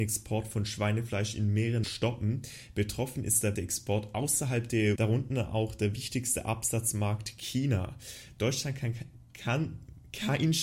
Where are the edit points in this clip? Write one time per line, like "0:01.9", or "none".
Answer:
0:01.8
0:03.5
0:05.0